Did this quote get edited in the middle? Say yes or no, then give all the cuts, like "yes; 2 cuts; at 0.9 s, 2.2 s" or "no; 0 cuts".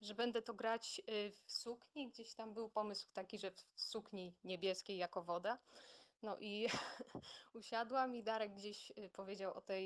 yes; 1 cut; at 1.4 s